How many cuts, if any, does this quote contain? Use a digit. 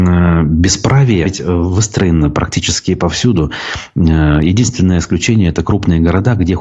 1